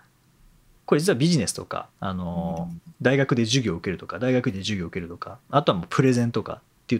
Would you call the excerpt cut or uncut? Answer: cut